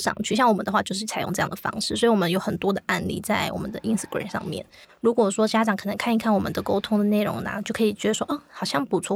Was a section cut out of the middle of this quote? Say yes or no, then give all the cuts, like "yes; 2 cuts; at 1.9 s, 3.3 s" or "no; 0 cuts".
no; 0 cuts